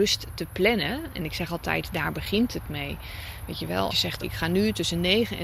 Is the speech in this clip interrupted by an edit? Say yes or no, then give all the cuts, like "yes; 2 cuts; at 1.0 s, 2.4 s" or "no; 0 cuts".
yes; 2 cuts; at 3.9 s, 4.2 s